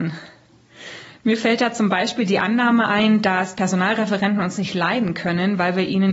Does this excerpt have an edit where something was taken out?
no; 0 cuts

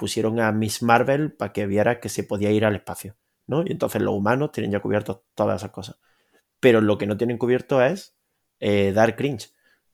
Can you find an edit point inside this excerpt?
no; 0 cuts

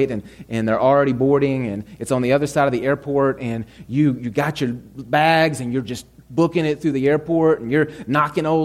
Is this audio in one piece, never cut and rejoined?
yes; 0 cuts

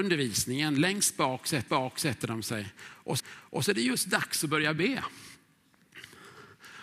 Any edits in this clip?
yes; 2 cuts; at 1.7 s, 3.2 s

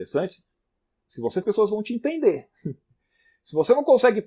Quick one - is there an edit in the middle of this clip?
yes; 1 cut; at 1.4 s

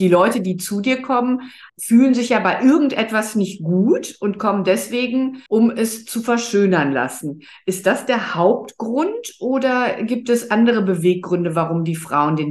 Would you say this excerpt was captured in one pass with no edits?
no; 2 cuts; at 1.7 s, 5.5 s

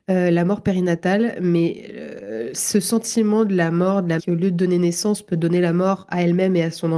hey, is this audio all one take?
no; 1 cut; at 4.2 s

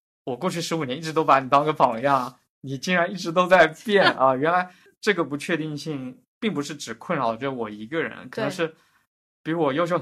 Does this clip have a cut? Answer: no; 0 cuts

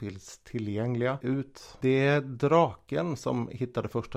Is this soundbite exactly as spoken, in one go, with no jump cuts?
no; 1 cut; at 1.2 s

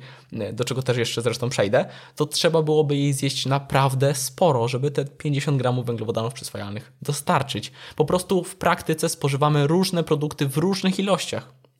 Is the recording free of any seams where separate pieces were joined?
yes; 0 cuts

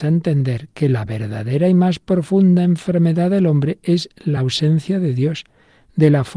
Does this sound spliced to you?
no; 0 cuts

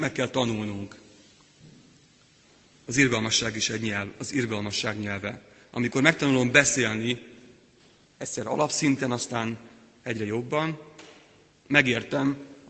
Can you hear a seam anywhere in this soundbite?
no; 0 cuts

